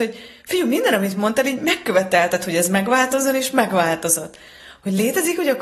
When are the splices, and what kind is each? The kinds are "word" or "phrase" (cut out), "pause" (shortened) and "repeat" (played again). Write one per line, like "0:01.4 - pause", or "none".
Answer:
none